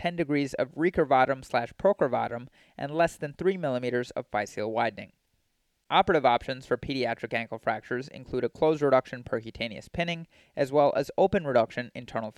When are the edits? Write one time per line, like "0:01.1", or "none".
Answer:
none